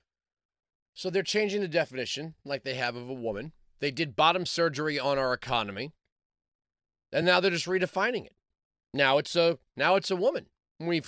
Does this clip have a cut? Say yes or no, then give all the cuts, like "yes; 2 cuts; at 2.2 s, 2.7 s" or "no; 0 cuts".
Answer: no; 0 cuts